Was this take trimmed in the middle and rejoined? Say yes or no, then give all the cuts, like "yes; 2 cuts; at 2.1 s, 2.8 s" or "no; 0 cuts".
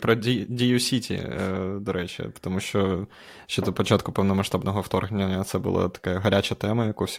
no; 0 cuts